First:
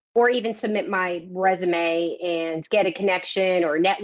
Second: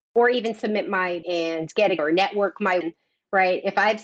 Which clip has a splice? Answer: second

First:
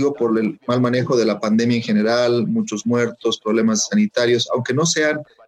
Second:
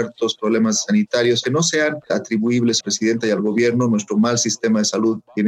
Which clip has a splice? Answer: second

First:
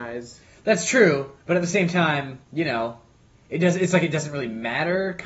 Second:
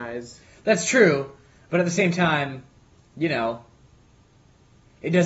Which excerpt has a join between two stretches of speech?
first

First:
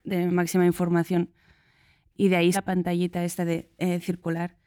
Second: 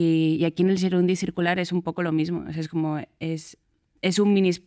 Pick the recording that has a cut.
first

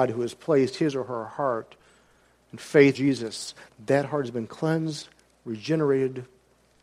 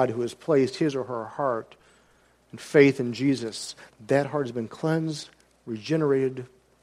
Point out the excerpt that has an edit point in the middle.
first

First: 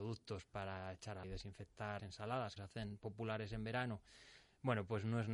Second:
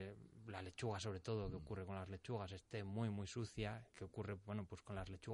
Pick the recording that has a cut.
first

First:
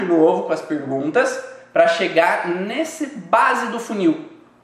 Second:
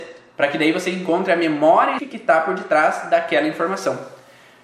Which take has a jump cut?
second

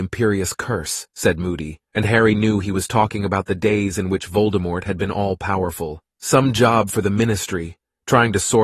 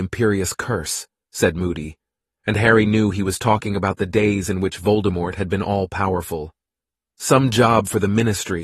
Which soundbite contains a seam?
first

